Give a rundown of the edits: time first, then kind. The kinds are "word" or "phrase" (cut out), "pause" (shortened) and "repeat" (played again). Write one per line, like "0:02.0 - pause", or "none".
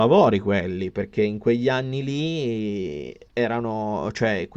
0:03.3 - pause